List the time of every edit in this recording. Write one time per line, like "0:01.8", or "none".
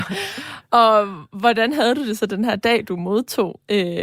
none